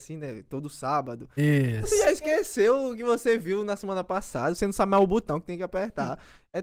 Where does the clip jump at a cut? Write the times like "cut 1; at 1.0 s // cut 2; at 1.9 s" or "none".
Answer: none